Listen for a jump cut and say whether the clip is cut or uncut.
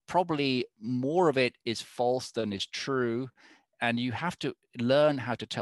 uncut